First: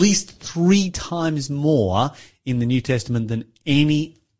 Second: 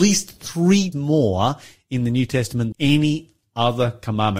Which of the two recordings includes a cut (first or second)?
second